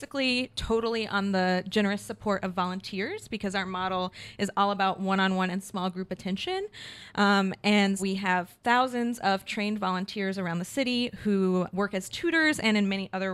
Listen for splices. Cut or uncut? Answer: cut